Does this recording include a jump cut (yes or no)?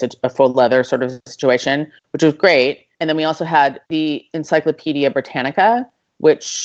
yes